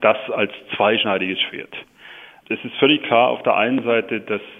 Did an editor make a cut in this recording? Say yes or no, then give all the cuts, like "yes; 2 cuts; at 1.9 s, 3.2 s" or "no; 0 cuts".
no; 0 cuts